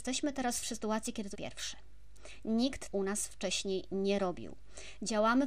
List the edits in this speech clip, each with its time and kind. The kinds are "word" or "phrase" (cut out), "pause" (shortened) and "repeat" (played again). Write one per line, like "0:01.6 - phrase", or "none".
0:01.3 - phrase
0:02.9 - word